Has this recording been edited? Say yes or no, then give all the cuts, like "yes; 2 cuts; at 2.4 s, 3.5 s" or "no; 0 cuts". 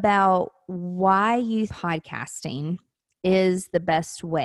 yes; 1 cut; at 1.7 s